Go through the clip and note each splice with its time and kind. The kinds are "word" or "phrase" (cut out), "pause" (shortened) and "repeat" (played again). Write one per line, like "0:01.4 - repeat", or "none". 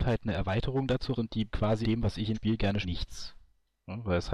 0:01.2 - word
0:01.5 - word
0:01.8 - word
0:02.3 - word
0:02.8 - word